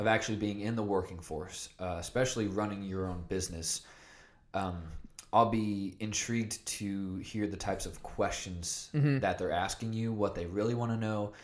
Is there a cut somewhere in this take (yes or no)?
no